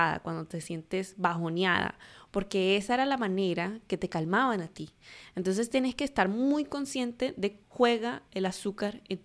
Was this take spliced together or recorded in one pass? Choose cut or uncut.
cut